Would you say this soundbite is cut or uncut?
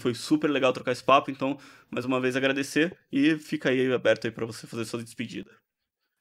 uncut